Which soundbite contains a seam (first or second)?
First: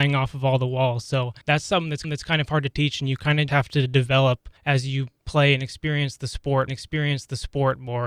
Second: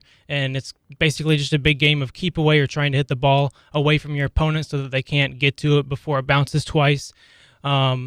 first